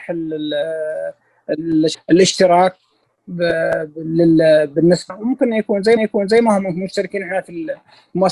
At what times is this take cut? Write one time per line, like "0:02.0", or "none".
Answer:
0:01.9
0:05.1
0:06.0